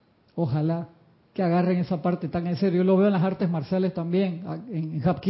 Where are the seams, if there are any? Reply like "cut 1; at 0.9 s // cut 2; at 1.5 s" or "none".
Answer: none